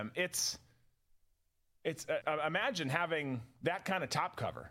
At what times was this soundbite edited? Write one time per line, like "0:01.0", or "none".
0:02.2